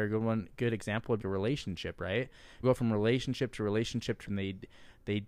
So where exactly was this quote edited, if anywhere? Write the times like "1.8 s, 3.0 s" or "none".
1.2 s, 2.6 s, 4.2 s

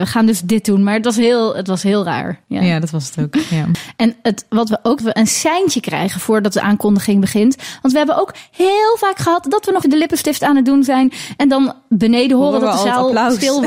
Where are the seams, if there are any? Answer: 5.0 s, 9.8 s

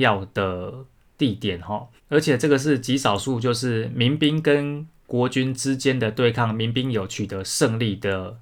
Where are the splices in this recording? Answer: 2.0 s

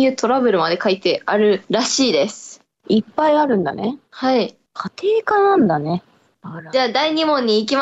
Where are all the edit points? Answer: 1.6 s, 4.1 s, 4.7 s

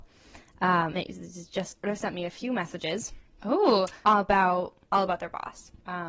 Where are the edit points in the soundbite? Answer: 0.9 s, 4.8 s

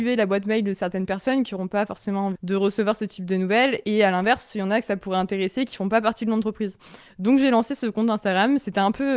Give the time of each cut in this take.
2.3 s

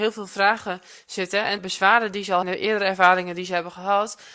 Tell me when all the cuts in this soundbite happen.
1.6 s, 2.4 s

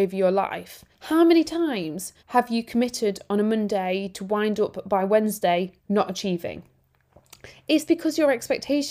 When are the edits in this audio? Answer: 0.9 s, 2.2 s, 5.8 s

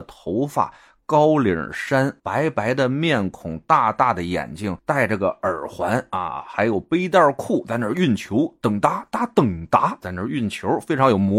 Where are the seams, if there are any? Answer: 10.0 s

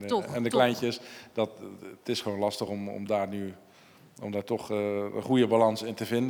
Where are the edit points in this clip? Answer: none

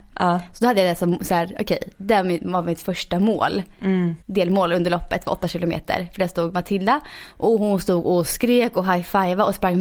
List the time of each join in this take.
4.2 s

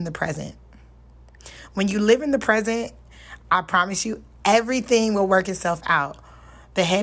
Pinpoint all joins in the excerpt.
none

